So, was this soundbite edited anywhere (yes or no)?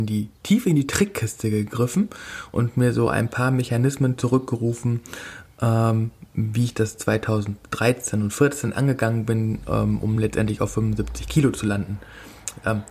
no